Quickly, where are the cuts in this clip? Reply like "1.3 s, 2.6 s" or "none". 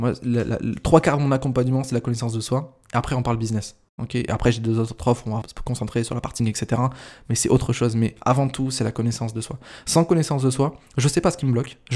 5.4 s, 6.4 s